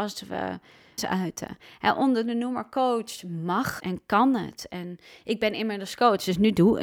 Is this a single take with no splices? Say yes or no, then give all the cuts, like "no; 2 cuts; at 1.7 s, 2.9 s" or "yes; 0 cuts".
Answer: no; 2 cuts; at 1.0 s, 3.8 s